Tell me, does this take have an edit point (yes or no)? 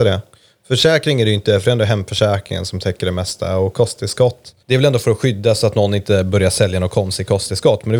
yes